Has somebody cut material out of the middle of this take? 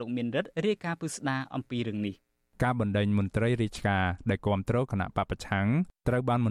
yes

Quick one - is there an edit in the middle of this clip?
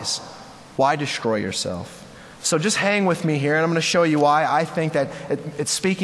yes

